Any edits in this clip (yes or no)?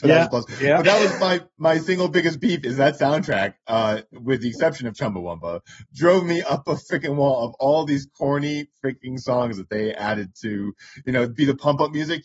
no